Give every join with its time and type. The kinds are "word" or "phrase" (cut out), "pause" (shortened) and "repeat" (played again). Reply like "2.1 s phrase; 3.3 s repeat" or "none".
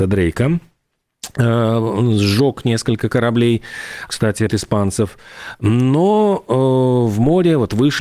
4.1 s word; 4.5 s word